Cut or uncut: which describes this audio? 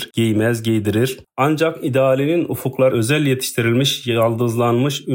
cut